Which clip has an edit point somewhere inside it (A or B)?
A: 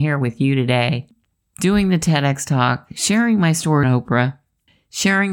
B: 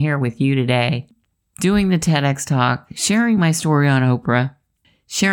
A